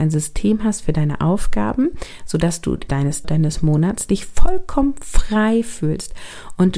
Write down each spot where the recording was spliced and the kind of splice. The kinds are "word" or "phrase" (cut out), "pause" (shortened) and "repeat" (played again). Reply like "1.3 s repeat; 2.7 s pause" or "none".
2.9 s word; 3.2 s phrase